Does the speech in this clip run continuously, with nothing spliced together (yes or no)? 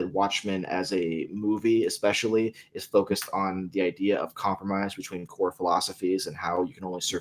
no